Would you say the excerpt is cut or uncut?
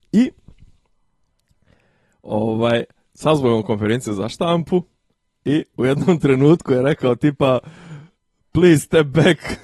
uncut